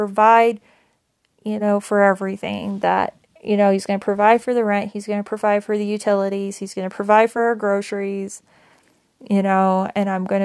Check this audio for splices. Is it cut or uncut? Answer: uncut